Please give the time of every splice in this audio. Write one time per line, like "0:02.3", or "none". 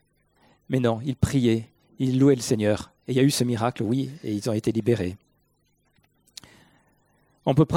none